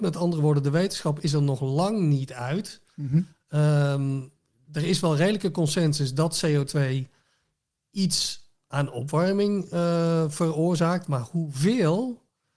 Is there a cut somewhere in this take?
no; 0 cuts

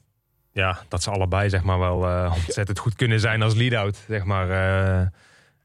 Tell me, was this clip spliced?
no; 0 cuts

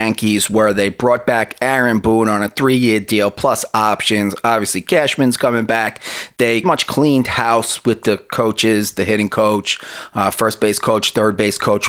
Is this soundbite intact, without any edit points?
no; 1 cut; at 6.6 s

